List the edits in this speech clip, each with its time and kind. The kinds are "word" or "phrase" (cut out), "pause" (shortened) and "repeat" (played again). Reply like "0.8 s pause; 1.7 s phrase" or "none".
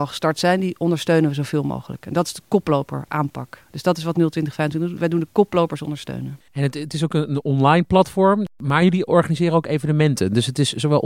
6.5 s pause